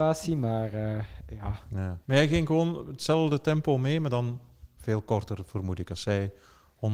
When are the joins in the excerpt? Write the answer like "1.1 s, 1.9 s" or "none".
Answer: 2.0 s